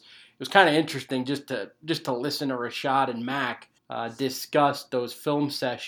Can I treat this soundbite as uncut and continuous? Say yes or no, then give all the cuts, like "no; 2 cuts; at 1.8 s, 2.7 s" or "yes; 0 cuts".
no; 1 cut; at 3.8 s